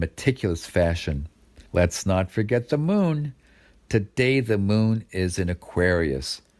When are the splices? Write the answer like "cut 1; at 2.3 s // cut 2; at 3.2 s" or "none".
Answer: cut 1; at 1.7 s